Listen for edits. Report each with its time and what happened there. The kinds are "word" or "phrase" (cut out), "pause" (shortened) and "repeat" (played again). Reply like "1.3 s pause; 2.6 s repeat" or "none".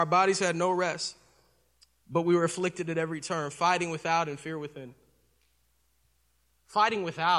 none